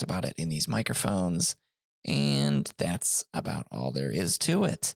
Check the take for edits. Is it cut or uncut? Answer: uncut